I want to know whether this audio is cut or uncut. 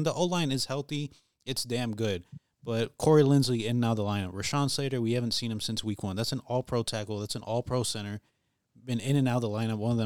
uncut